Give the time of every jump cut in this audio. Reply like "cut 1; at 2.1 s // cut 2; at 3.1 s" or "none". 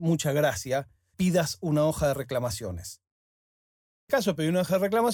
cut 1; at 1.1 s // cut 2; at 4.1 s